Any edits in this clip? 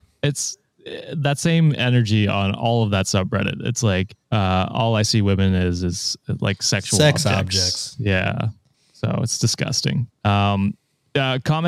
yes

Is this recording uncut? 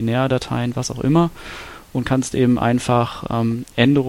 yes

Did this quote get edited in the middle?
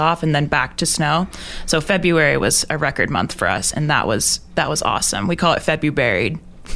no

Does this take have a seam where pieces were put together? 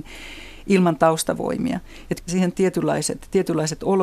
yes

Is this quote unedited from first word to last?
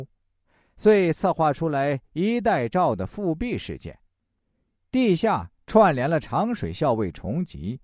yes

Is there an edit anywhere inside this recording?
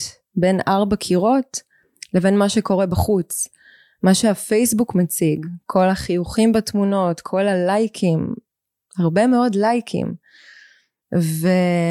no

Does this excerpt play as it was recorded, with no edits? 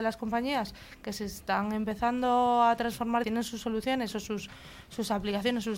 no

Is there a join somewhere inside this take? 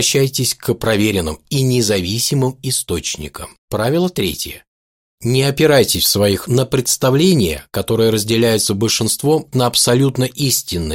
yes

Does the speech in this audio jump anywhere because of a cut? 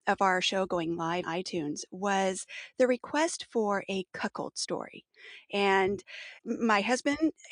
yes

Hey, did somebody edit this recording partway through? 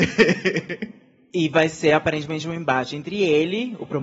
no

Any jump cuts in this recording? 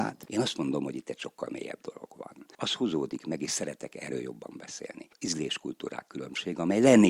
no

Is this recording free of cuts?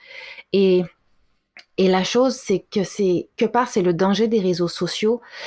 no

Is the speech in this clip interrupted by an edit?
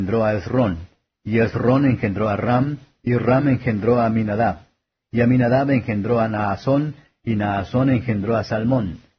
no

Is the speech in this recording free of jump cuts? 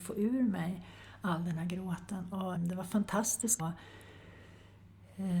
no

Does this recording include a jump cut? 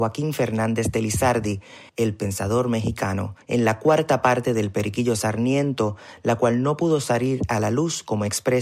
yes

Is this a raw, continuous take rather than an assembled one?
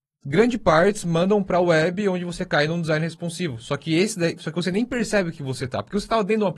yes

